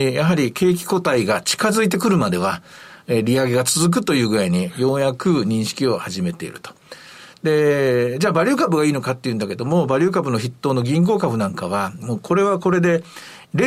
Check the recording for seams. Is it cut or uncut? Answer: cut